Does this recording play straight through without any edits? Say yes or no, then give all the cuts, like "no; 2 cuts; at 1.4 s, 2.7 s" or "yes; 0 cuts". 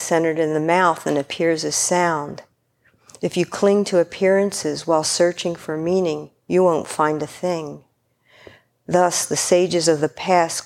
yes; 0 cuts